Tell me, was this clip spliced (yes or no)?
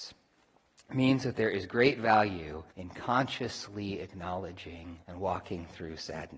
yes